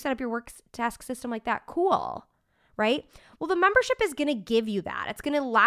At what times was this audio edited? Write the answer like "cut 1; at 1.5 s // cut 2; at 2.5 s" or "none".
none

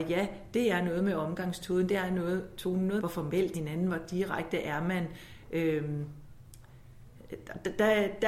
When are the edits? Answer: cut 1; at 3.0 s // cut 2; at 3.5 s

